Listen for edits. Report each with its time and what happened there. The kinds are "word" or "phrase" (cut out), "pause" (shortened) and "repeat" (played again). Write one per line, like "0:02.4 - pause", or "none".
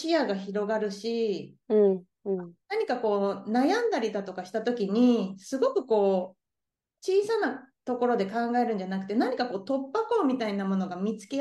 0:01.6 - pause
0:02.6 - pause

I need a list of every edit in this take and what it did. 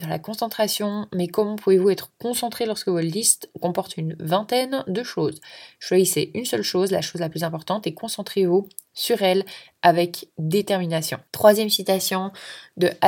0:11.3 - pause

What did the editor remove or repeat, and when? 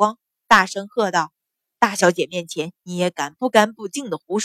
0:01.4 - pause

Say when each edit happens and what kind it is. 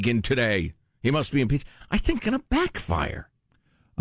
0:02.2 - word

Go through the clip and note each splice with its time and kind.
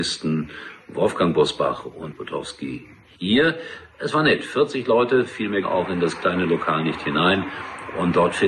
0:02.1 - word
0:05.6 - word

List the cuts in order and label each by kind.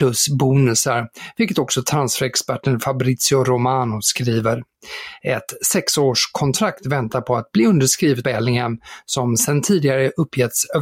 0:08.2 - word

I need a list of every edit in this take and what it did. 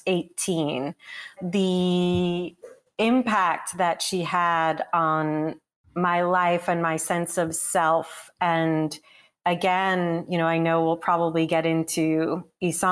0:01.4 - word

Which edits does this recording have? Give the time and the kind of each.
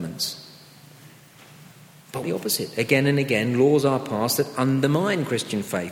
0:02.2 - phrase

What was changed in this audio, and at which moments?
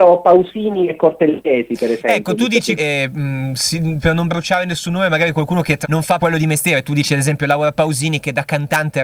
0:02.8 - word
0:04.0 - word
0:05.8 - word
0:06.2 - word

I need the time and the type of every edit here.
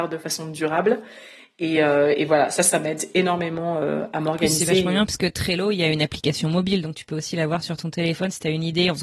none

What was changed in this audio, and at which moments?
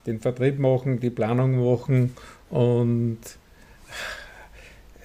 none

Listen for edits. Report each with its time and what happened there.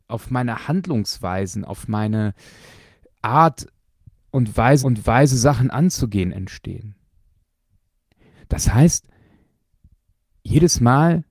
0:04.8 - repeat

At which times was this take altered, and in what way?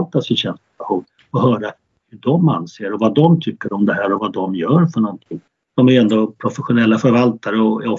none

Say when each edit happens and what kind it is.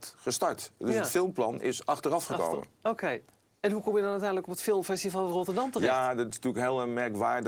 none

